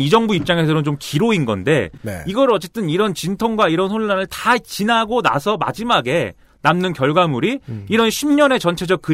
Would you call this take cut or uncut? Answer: uncut